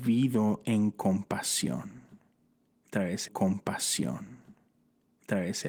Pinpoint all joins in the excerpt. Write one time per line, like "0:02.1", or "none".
0:03.3